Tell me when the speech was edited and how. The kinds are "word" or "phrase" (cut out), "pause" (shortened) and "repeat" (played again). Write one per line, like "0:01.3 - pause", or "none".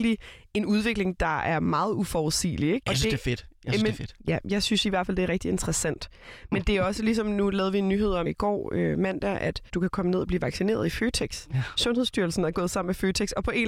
0:09.7 - pause